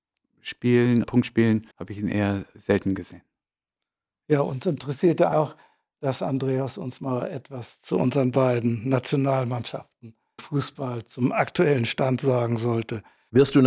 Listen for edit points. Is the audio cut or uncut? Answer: cut